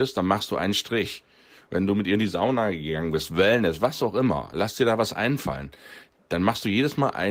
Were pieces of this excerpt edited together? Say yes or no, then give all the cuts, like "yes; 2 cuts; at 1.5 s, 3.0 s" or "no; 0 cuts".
no; 0 cuts